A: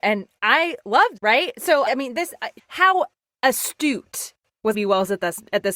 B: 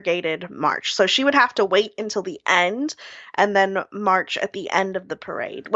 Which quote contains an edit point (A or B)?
A